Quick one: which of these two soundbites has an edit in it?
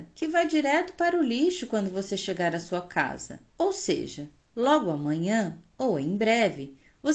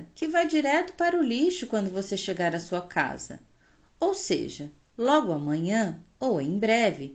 first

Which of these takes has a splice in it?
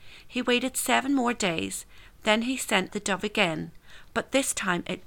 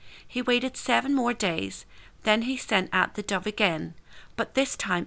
first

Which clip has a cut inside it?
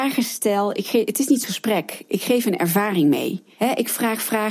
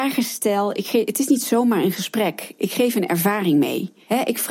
first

